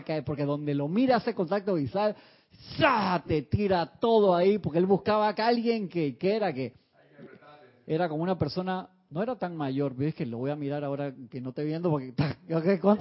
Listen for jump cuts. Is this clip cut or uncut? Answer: uncut